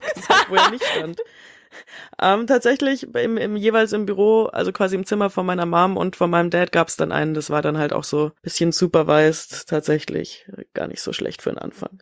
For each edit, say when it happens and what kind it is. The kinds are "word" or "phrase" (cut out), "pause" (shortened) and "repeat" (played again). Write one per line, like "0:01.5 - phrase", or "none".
0:08.4 - pause